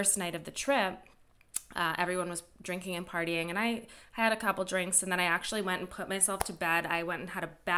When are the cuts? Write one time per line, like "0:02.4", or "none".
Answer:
none